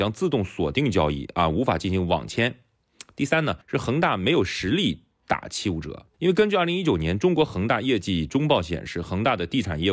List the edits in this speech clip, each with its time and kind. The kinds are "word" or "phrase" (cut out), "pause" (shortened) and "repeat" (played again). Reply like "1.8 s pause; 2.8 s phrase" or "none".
3.6 s pause; 6.1 s pause